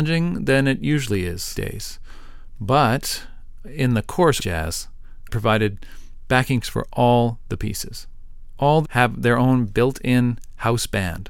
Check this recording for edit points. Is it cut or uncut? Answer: cut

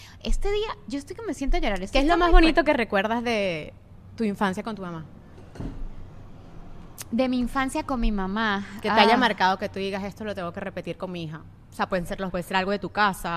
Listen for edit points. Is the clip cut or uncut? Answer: cut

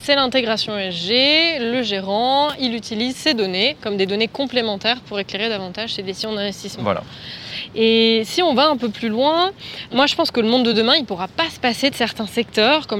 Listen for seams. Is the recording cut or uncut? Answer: uncut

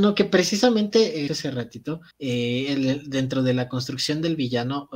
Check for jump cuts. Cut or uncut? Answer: cut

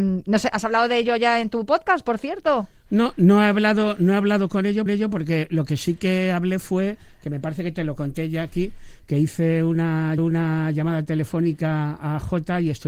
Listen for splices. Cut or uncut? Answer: cut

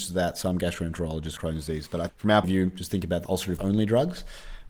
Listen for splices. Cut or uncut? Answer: cut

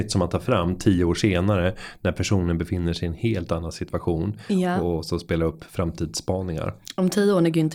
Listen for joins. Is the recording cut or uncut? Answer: uncut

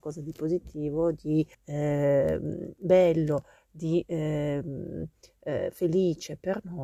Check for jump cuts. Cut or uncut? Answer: cut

